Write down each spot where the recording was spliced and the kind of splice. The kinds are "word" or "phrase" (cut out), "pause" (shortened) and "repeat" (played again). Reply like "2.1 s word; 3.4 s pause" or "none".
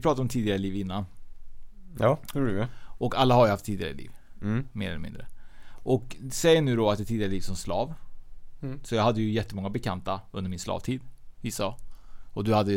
7.0 s phrase